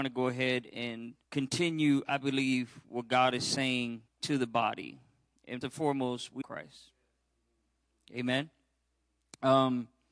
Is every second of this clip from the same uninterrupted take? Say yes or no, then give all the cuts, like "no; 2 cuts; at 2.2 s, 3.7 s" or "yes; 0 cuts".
no; 4 cuts; at 1.2 s, 4.1 s, 5.6 s, 6.4 s